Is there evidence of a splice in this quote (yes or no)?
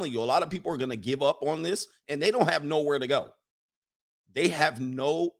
no